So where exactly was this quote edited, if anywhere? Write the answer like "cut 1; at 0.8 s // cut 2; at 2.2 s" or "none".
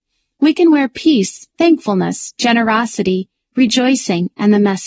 cut 1; at 1.5 s